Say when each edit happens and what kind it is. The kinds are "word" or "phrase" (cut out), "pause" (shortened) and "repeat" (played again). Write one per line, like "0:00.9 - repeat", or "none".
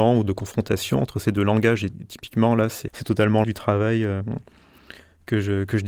0:02.9 - word
0:03.4 - word